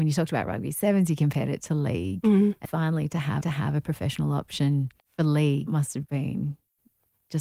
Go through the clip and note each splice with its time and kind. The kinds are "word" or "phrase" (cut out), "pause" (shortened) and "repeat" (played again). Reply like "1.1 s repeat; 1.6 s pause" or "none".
2.7 s word; 3.4 s repeat; 5.0 s pause; 5.7 s word; 6.1 s word